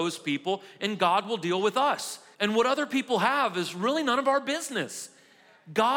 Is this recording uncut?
no; 1 cut; at 2.3 s

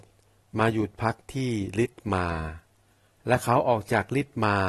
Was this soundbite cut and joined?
no; 0 cuts

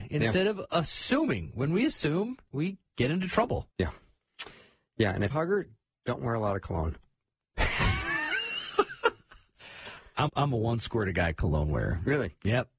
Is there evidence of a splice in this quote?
yes; 3 cuts; at 3.7 s, 5.3 s, 10.3 s

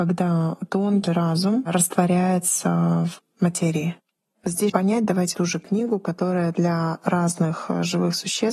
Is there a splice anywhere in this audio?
yes; 3 cuts; at 1.1 s, 4.7 s, 5.3 s

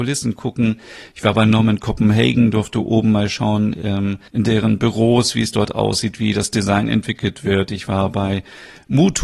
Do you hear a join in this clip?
yes; 1 cut; at 4.3 s

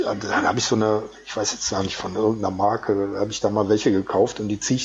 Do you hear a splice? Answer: no; 0 cuts

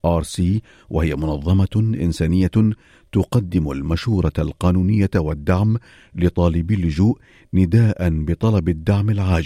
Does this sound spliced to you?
no; 0 cuts

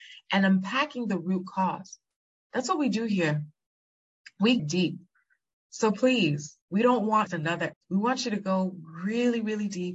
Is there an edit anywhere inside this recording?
yes; 4 cuts; at 4.6 s, 6.6 s, 7.3 s, 7.7 s

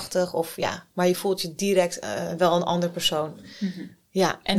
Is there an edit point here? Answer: yes; 1 cut; at 0.9 s

